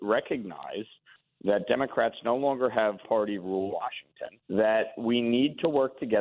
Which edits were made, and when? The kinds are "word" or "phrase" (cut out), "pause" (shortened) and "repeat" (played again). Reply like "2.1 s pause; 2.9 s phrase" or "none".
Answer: 3.0 s word; 3.7 s word; 4.4 s pause